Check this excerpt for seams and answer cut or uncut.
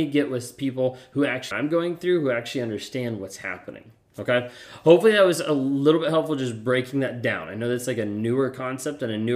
cut